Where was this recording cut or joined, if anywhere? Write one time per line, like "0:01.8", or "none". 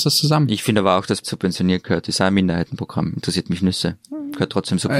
0:01.2